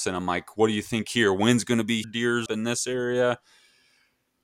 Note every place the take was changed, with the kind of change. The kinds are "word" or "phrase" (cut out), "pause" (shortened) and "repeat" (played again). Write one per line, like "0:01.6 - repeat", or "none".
0:02.0 - word
0:02.5 - word